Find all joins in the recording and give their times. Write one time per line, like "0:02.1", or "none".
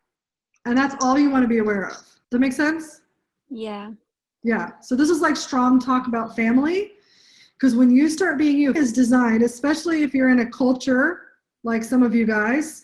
0:02.2
0:08.8